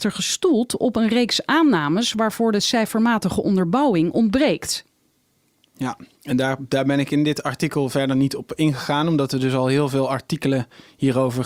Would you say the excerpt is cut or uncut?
uncut